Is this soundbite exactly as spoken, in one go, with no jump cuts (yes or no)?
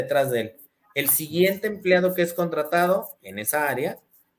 yes